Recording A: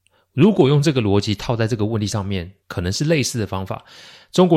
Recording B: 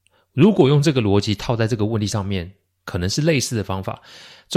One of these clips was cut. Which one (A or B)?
A